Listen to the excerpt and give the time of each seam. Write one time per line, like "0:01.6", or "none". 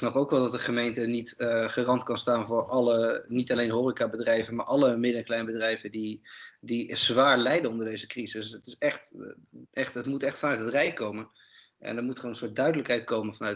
0:09.7